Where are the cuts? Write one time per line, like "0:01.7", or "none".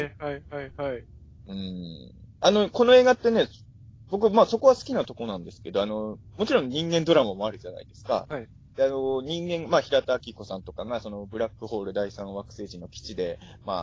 0:02.3